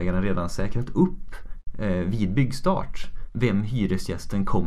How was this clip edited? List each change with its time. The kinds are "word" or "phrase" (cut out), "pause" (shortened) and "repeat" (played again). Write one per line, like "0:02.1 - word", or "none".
none